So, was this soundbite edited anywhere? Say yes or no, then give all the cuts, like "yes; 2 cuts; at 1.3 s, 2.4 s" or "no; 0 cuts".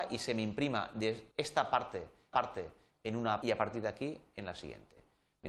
yes; 3 cuts; at 1.3 s, 2.3 s, 3.4 s